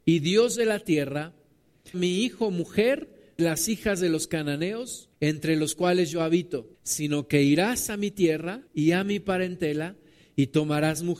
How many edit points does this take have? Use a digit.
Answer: 5